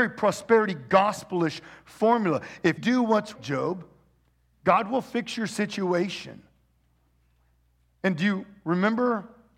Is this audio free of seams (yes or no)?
no